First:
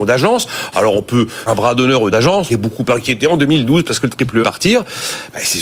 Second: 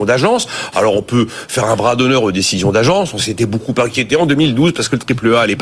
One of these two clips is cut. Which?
first; 4 cuts; at 1.5 s, 2.1 s, 2.5 s, 4.4 s

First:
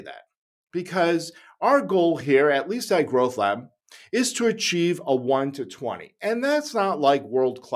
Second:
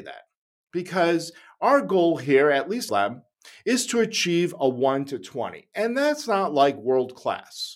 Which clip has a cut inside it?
second; 1 cut; at 2.9 s

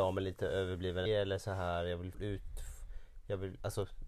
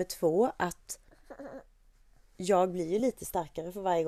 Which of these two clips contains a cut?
first; 2 cuts; at 1.1 s, 2.1 s

